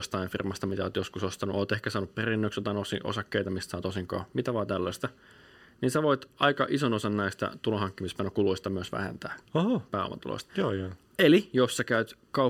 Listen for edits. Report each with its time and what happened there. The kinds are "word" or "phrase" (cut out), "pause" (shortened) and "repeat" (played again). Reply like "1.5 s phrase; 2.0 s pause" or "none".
none